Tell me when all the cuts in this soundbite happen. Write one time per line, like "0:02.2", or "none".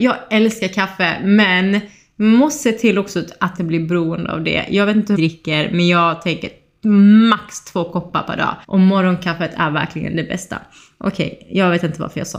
0:03.6
0:05.1
0:08.6

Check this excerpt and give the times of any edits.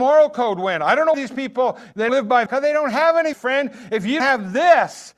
0:01.1
0:02.1
0:02.5
0:03.3
0:04.2

